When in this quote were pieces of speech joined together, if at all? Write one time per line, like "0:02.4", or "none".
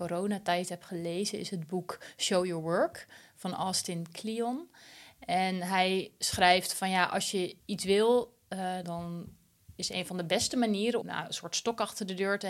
0:07.6
0:08.8
0:11.0